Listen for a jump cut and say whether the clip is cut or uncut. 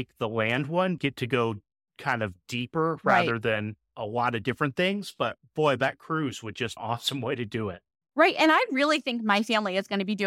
cut